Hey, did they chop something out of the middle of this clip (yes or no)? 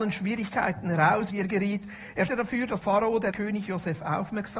yes